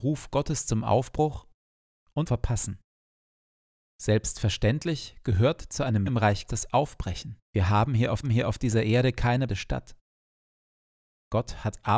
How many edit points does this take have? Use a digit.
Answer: 6